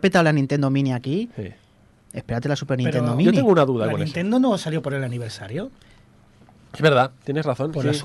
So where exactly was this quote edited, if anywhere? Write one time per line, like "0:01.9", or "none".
none